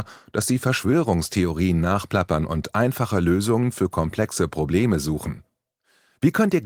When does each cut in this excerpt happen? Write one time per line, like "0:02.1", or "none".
none

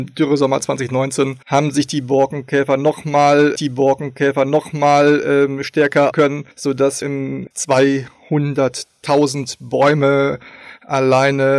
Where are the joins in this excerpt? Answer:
0:01.4
0:03.6
0:06.1
0:06.5
0:07.0
0:07.5

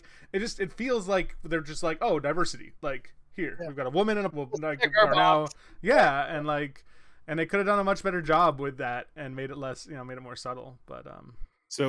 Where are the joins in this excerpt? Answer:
0:04.3

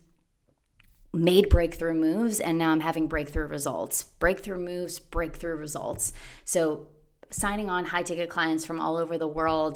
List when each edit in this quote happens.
none

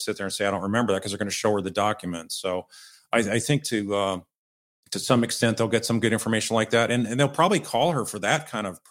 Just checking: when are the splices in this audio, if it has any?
none

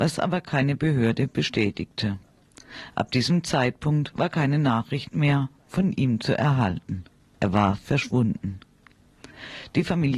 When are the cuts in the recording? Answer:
0:07.2

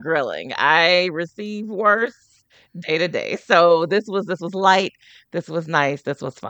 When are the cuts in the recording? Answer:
none

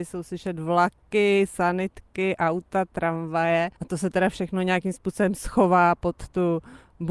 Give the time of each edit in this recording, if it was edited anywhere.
0:03.8

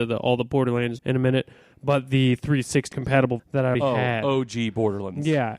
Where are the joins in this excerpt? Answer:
0:01.0
0:02.9
0:03.4
0:03.7

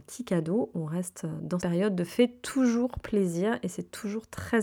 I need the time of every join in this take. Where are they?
0:01.6
0:02.1

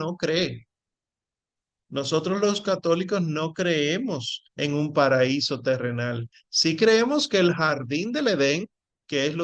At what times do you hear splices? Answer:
0:04.5

